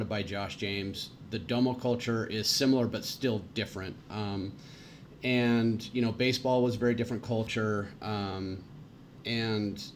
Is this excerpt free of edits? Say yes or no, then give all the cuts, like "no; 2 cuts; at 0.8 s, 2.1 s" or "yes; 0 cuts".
yes; 0 cuts